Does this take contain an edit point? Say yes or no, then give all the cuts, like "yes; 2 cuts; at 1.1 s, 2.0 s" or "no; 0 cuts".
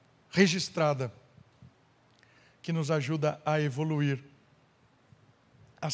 no; 0 cuts